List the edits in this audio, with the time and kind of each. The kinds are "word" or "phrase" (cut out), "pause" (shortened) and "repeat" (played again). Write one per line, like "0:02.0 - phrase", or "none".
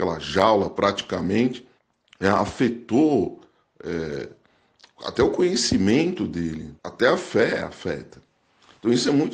0:01.8 - pause
0:06.8 - pause